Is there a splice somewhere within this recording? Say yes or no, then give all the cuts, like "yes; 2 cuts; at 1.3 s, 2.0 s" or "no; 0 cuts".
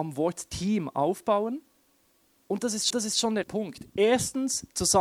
yes; 3 cuts; at 2.1 s, 2.9 s, 3.4 s